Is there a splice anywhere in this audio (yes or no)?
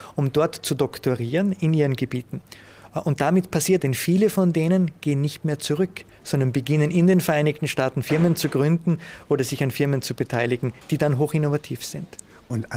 yes